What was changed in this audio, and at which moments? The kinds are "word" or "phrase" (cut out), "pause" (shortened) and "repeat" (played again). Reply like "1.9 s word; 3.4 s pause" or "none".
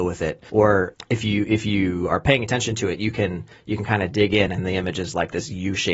none